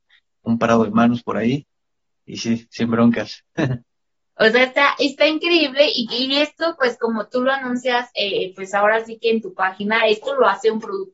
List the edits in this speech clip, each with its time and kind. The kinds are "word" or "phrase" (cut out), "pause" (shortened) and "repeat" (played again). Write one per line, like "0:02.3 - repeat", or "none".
none